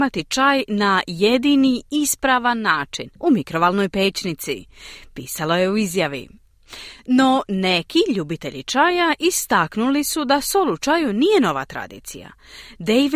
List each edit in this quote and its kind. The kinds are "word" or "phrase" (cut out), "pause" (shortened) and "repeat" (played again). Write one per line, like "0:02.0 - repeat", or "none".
0:03.2 - pause

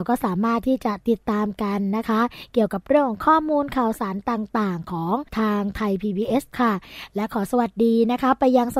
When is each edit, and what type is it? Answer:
0:05.3 - pause
0:06.5 - word

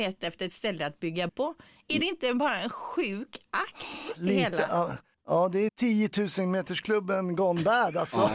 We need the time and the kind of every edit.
0:01.3 - word
0:05.1 - pause
0:05.7 - word

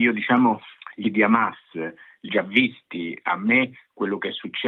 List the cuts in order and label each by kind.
0:01.0 - word
0:02.3 - word

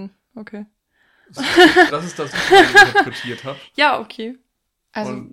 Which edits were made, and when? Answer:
0:01.4 - word
0:01.9 - word
0:02.3 - word

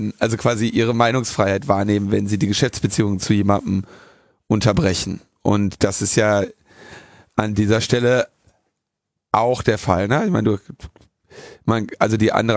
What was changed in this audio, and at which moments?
none

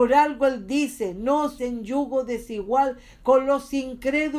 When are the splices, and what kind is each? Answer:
0:01.6 - word

